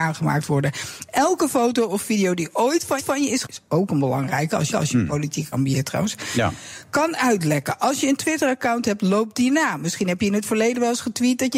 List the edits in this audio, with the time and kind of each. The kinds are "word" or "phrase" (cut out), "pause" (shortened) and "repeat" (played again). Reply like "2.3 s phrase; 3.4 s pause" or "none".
3.0 s repeat; 3.4 s word; 4.7 s repeat; 5.5 s word